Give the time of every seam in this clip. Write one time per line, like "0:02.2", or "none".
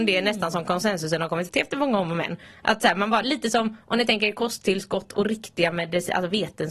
0:01.5
0:03.2